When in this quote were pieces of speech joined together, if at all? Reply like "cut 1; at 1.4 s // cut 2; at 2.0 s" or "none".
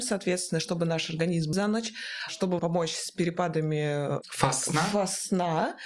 cut 1; at 1.5 s // cut 2; at 2.6 s